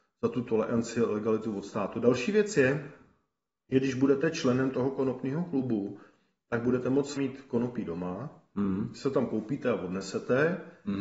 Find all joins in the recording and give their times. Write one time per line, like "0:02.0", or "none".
0:07.2